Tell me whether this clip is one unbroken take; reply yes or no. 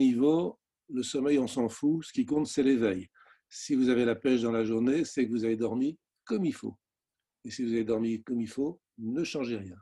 yes